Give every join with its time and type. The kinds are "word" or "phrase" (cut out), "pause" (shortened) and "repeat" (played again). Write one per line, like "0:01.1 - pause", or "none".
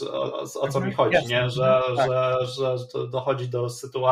none